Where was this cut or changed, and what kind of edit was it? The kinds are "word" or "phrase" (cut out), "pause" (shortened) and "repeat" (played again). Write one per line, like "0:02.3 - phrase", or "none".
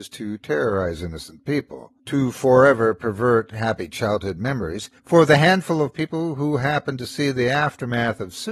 0:02.0 - pause
0:05.0 - pause